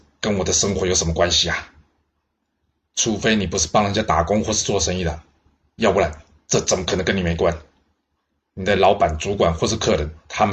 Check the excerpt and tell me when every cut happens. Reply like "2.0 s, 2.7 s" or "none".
none